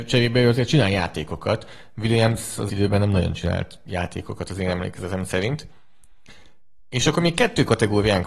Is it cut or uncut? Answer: cut